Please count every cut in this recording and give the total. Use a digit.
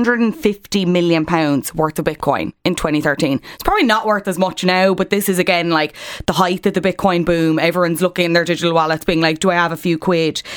0